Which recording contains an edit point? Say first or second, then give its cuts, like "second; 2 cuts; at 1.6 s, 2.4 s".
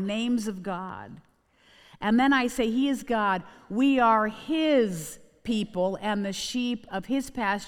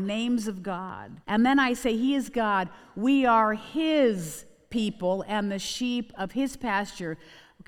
second; 1 cut; at 1.2 s